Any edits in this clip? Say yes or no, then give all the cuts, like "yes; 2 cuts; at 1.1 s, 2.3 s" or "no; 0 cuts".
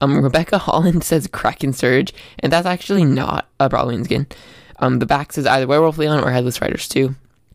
no; 0 cuts